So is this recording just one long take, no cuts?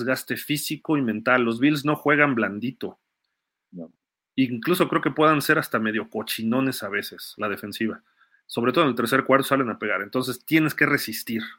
yes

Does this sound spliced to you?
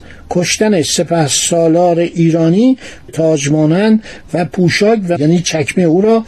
yes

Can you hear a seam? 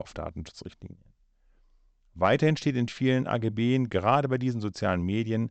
no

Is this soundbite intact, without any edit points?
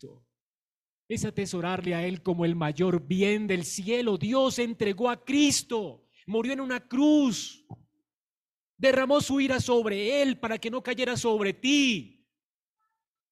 yes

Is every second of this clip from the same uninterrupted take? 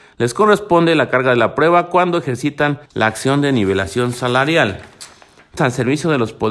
no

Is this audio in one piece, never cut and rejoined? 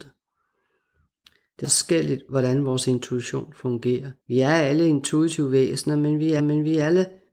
no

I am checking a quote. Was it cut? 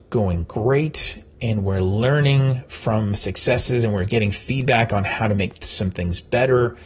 no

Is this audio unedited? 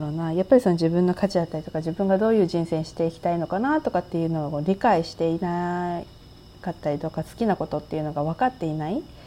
yes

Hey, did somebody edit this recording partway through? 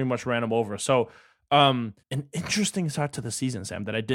yes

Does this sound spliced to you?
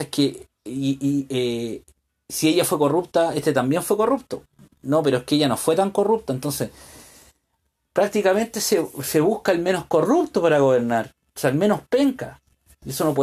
no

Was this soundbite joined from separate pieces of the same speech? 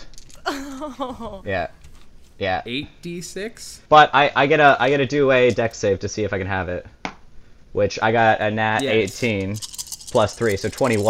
yes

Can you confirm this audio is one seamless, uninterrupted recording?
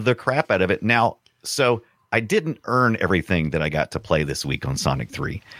yes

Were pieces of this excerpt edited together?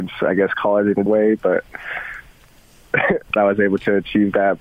yes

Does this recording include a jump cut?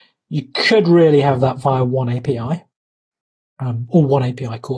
no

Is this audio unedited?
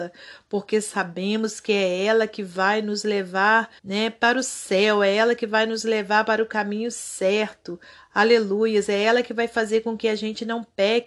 no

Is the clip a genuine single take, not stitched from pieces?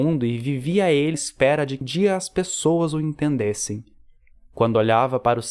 no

